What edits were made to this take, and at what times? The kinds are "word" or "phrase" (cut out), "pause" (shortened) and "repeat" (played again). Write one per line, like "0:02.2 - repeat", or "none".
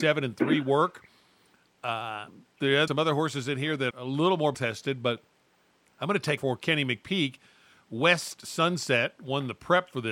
0:02.9 - word
0:03.9 - word
0:04.5 - word
0:06.4 - word